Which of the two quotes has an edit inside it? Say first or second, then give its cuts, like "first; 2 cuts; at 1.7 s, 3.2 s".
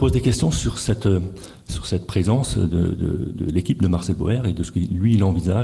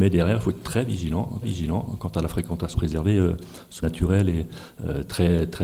second; 3 cuts; at 1.4 s, 2.7 s, 3.8 s